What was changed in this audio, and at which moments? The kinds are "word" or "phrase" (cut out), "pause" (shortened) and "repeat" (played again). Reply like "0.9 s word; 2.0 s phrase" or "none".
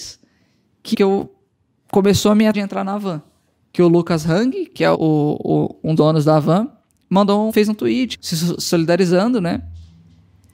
0.9 s word; 2.5 s word; 4.9 s word; 6.0 s word; 7.5 s word; 8.1 s word